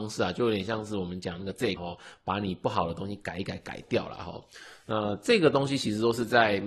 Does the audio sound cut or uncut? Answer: cut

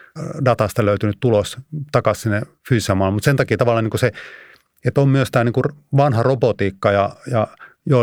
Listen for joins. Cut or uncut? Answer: uncut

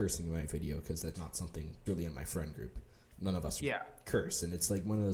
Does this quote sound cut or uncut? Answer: cut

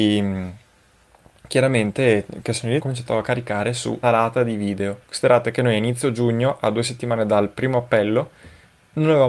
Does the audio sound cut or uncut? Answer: cut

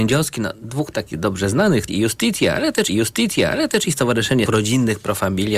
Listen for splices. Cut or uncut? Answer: cut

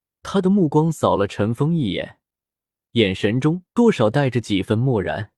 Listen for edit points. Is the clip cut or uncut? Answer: cut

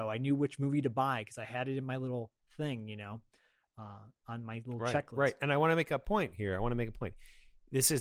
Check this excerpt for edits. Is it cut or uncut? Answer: uncut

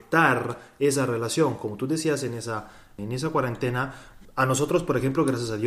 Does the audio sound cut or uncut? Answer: uncut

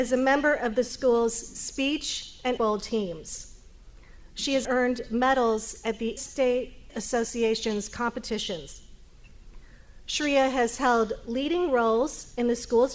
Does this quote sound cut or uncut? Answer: cut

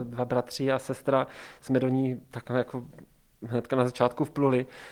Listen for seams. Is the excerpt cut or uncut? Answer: uncut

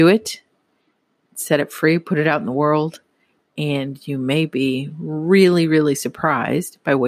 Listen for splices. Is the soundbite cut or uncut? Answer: uncut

